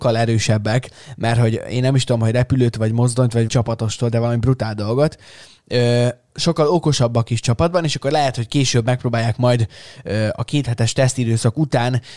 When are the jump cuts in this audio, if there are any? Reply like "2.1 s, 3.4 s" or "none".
3.5 s

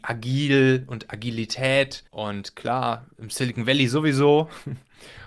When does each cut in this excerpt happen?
2.1 s

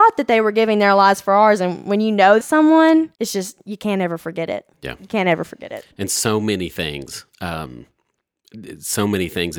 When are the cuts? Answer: 2.4 s, 3.1 s, 4.7 s, 5.9 s

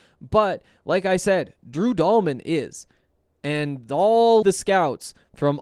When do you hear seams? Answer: 4.4 s

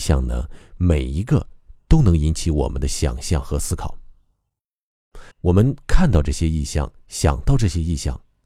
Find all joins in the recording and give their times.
5.3 s

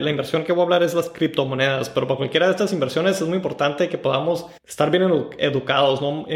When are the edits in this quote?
4.6 s

